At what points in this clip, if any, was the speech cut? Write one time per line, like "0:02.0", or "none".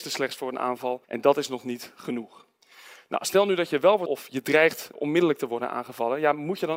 0:01.0
0:04.1
0:04.9